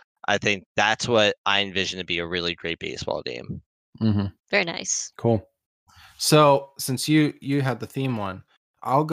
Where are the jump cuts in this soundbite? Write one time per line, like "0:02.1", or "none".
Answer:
0:04.4
0:05.1